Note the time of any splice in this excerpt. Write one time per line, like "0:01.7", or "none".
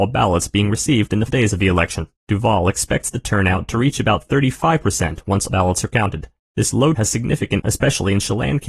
0:01.3
0:02.1
0:05.5
0:06.4
0:07.0
0:07.6

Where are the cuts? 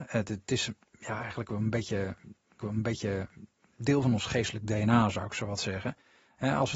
0:02.6

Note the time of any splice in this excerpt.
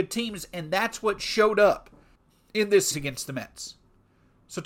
0:02.2
0:02.9

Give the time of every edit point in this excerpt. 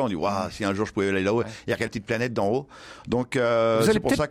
0:01.9

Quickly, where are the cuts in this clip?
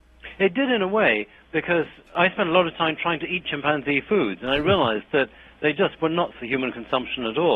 0:06.3

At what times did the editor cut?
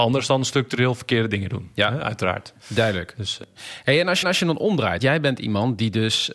0:04.2
0:05.0

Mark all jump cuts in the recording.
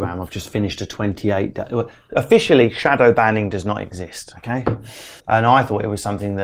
0:05.2

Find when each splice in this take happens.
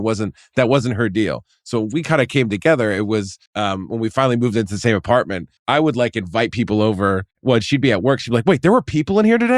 0:03.5
0:05.6
0:07.3

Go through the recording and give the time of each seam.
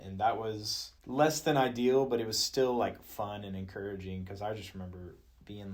0:01.0

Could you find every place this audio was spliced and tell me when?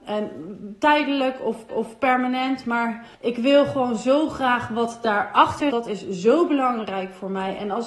0:01.7
0:03.1
0:05.7

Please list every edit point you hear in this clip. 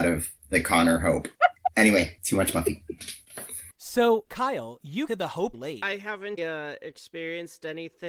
0:05.1
0:05.5
0:06.4

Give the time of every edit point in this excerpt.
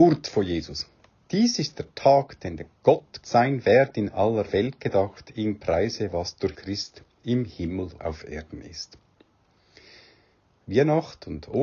0:03.2
0:06.6
0:08.0

